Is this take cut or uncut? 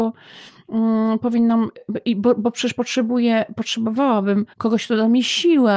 cut